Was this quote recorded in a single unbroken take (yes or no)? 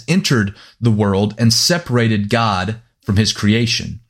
yes